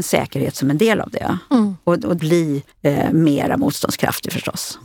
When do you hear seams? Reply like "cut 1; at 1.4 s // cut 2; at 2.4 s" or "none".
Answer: cut 1; at 2.2 s // cut 2; at 2.7 s

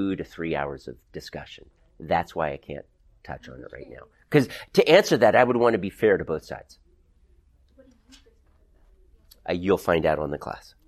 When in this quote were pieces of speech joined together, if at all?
none

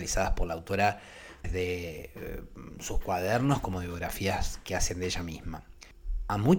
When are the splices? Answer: cut 1; at 1.4 s

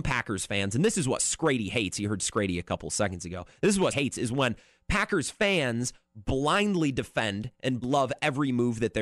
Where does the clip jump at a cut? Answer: cut 1; at 3.9 s // cut 2; at 7.8 s

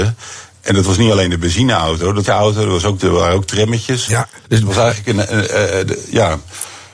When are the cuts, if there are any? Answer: cut 1; at 2.3 s // cut 2; at 3.0 s // cut 3; at 4.4 s

